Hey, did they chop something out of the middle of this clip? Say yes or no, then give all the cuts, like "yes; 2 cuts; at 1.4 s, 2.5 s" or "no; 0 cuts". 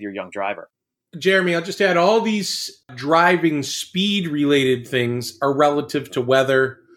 no; 0 cuts